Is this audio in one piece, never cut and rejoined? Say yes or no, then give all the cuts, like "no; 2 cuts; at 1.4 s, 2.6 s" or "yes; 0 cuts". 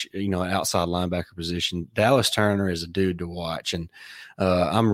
yes; 0 cuts